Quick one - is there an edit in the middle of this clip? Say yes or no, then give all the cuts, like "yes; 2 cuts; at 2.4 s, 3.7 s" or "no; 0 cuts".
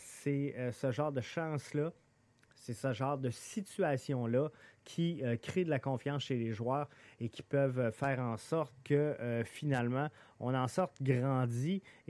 no; 0 cuts